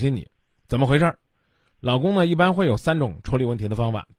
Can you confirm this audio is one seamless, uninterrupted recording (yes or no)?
yes